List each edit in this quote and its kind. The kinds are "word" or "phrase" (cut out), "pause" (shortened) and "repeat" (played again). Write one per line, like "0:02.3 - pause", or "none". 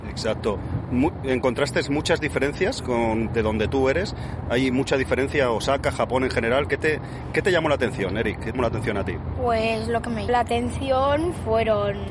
0:03.3 - phrase
0:08.5 - phrase
0:10.3 - word